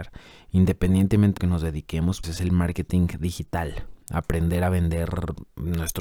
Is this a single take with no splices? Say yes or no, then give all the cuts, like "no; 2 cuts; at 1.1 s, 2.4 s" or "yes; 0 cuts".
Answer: no; 2 cuts; at 1.4 s, 2.2 s